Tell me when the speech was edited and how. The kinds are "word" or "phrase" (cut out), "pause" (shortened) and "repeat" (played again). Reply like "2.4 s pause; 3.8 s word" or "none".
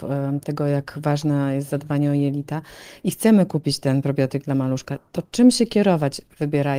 none